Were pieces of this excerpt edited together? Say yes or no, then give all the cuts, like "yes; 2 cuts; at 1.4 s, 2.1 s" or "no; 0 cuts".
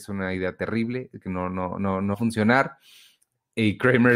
yes; 2 cuts; at 1.2 s, 2.1 s